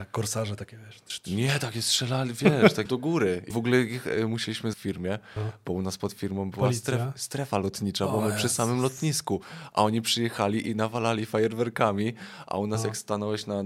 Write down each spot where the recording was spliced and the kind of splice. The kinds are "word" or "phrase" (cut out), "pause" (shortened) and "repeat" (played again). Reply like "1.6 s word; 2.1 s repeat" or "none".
2.9 s word; 3.5 s word; 4.7 s phrase